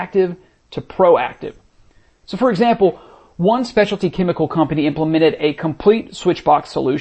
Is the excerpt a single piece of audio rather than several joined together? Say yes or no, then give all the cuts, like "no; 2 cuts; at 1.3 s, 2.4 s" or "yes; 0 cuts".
yes; 0 cuts